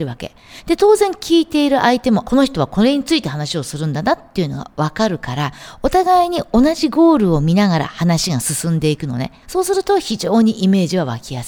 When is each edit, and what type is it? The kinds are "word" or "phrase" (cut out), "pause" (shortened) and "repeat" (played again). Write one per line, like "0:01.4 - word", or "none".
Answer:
0:02.2 - word
0:09.4 - pause